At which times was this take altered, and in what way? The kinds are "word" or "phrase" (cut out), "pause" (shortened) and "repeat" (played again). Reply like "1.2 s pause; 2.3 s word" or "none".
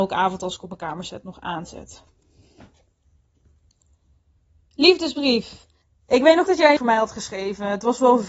5.8 s pause; 6.5 s word; 6.8 s word